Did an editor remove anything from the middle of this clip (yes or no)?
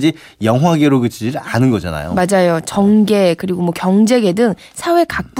no